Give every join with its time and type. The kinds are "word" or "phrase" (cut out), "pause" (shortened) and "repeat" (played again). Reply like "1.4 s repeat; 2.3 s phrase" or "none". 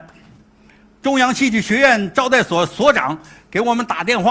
none